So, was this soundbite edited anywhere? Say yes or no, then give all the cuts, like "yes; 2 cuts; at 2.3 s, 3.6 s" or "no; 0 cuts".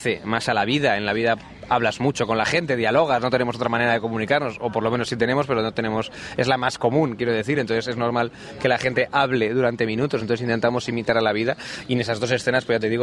no; 0 cuts